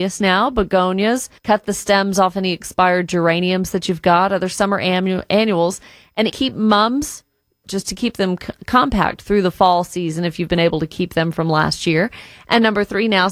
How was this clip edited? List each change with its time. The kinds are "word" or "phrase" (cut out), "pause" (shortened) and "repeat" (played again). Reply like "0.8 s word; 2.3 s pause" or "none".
1.4 s pause; 6.3 s word; 7.6 s word